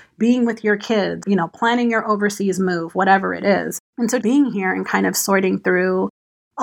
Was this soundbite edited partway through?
yes; 3 cuts; at 1.2 s, 3.9 s, 4.2 s

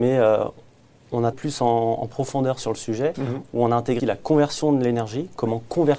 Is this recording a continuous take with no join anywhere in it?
no; 2 cuts; at 1.3 s, 4.0 s

